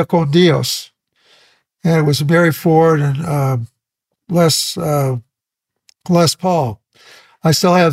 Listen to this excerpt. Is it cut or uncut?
uncut